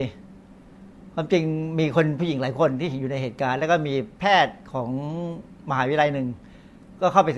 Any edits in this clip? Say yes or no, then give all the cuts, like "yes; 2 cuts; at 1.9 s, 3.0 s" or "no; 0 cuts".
no; 0 cuts